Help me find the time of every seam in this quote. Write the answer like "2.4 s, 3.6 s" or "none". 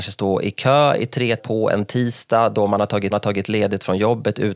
1.4 s, 3.1 s